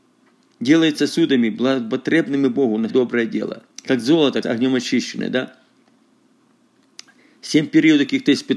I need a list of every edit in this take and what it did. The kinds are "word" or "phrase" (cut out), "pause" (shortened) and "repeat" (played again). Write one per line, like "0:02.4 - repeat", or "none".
0:02.9 - word
0:03.7 - pause
0:04.4 - phrase

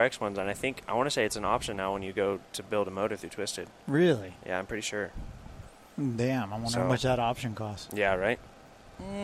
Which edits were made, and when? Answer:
none

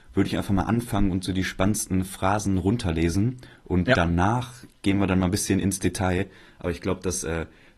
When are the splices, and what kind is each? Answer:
none

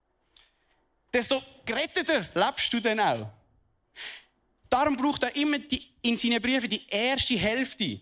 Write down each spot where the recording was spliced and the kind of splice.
none

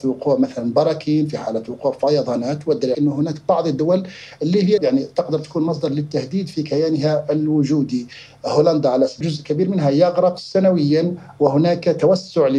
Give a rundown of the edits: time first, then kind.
0:02.9 - phrase
0:04.8 - phrase
0:09.2 - word

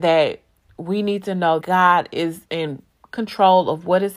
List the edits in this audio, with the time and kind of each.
0:01.6 - word
0:02.5 - pause

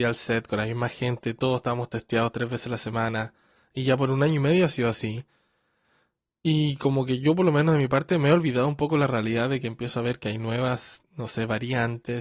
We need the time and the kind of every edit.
none

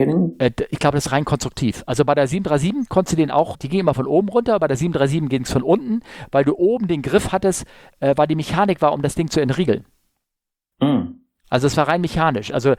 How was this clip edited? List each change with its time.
0:03.5 - word

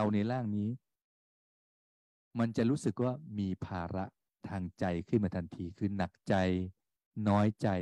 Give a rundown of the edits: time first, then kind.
none

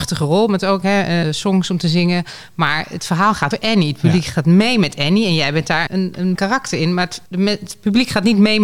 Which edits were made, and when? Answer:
0:01.2 - word
0:03.5 - word
0:05.9 - word
0:06.3 - word
0:07.3 - pause

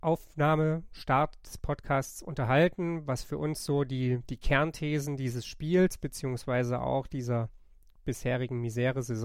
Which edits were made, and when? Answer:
none

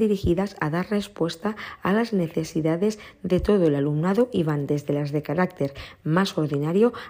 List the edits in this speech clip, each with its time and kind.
none

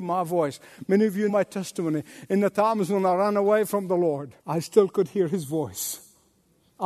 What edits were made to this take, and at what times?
0:01.3 - word
0:04.4 - pause

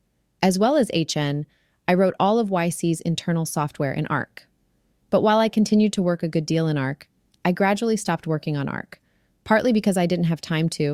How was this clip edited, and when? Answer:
none

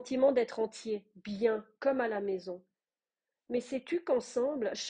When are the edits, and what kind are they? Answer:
none

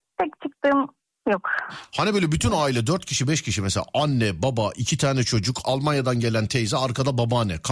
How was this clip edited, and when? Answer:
none

